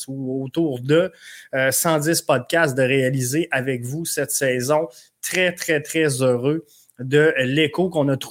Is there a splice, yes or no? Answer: no